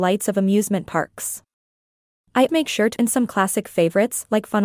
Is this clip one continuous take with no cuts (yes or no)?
no